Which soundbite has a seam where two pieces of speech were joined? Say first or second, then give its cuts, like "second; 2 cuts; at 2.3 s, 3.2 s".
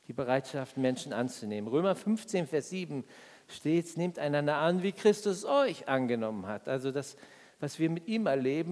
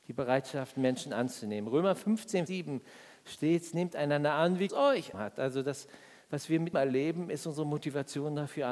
second; 4 cuts; at 2.5 s, 4.7 s, 5.1 s, 6.7 s